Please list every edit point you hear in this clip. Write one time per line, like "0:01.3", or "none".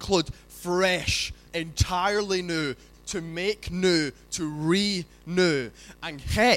0:01.5
0:02.9